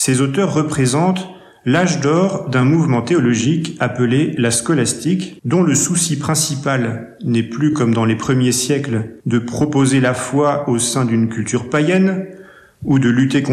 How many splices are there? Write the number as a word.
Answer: zero